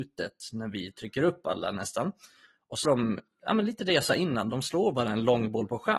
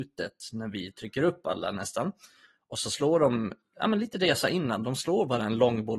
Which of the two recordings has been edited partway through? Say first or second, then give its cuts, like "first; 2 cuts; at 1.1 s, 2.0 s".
first; 1 cut; at 2.8 s